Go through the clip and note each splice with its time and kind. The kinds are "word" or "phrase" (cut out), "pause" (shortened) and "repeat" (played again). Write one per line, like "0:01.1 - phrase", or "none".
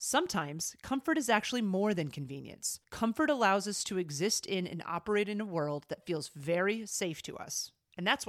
0:02.8 - pause